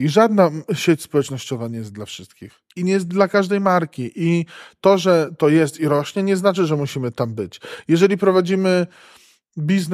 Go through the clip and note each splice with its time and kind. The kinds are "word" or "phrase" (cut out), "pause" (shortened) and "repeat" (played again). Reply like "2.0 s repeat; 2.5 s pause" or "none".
2.7 s pause